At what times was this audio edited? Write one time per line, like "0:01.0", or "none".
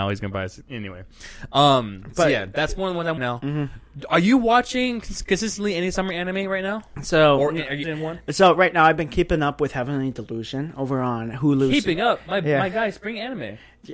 0:03.2
0:07.8